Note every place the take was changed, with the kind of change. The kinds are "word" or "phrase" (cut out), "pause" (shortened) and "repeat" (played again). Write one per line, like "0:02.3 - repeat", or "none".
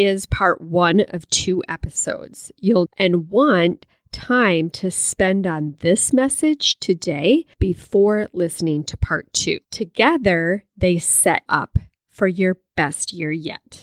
0:02.9 - word
0:07.5 - pause
0:09.6 - pause
0:11.5 - word